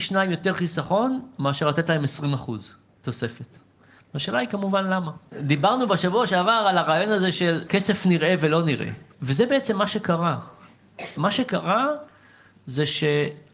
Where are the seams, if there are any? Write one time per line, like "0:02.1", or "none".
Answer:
none

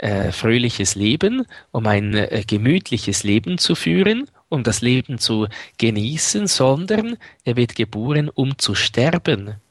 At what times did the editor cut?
none

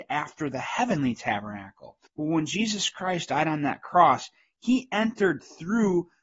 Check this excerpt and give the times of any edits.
0:02.1

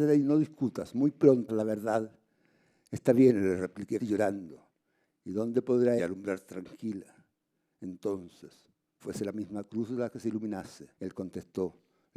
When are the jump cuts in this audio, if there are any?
0:01.5
0:04.0
0:06.0
0:09.0
0:10.9

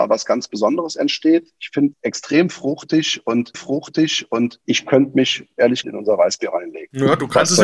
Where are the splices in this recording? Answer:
0:01.9
0:03.5
0:05.8

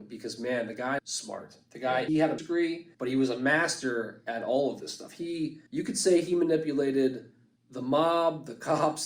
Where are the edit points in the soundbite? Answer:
0:01.0
0:02.1
0:02.4
0:02.9
0:05.7
0:07.6

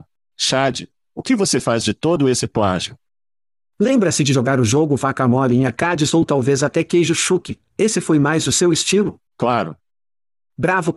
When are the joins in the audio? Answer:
0:09.3

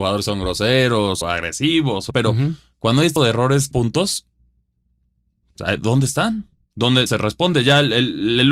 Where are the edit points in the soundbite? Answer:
0:01.2
0:02.1
0:03.2
0:03.7
0:07.1

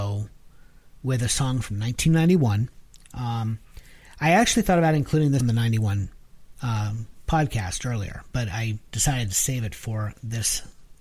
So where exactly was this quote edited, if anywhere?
0:05.4

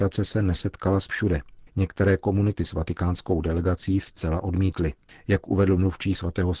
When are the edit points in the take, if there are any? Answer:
0:01.1
0:01.7
0:02.6
0:05.1

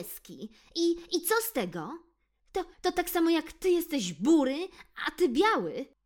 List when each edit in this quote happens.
0:02.7

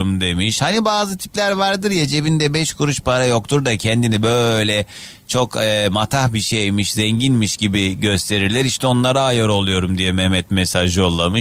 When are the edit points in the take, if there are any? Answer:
none

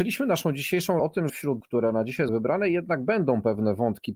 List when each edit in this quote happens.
0:01.0
0:01.3
0:01.6
0:02.3

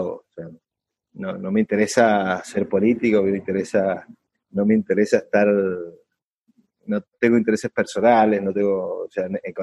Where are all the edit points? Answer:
none

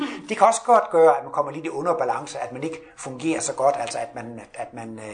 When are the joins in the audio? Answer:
none

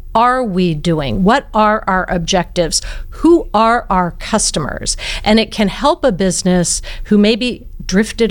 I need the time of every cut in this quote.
none

